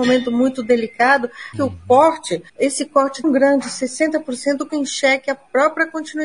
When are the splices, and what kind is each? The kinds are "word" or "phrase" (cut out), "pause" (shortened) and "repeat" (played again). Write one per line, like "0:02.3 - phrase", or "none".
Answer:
0:01.5 - word
0:02.5 - pause
0:03.2 - word
0:04.7 - word

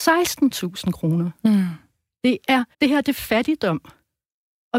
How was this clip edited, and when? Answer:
0:02.7 - pause

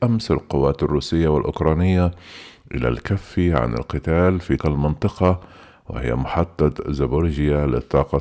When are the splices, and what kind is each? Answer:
0:04.6 - word

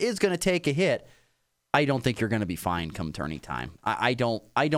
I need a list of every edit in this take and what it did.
none

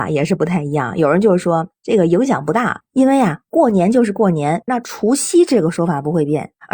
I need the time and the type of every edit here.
0:04.7 - phrase

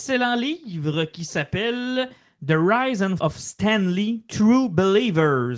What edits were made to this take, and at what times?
0:03.2 - word

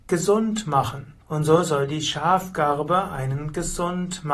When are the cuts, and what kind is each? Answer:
0:01.2 - pause

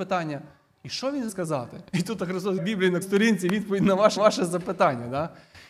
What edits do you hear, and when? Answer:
0:01.3 - word
0:01.9 - pause
0:02.6 - word
0:03.0 - word
0:04.2 - repeat

